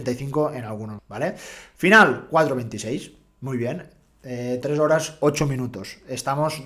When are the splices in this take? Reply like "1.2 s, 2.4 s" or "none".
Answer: 1.0 s, 4.6 s